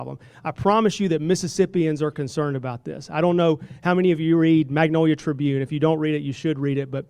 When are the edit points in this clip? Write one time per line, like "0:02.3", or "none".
none